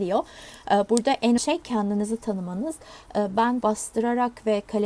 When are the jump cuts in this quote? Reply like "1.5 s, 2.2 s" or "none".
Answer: 1.4 s, 3.6 s